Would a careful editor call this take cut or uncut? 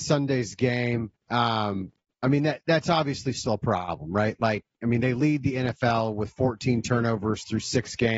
cut